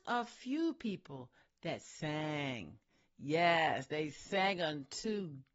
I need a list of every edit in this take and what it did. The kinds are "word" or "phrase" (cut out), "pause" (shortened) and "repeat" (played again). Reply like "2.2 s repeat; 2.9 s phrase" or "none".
none